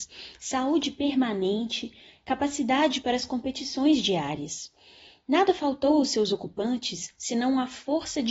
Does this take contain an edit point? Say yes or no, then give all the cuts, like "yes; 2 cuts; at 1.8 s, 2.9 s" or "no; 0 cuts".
no; 0 cuts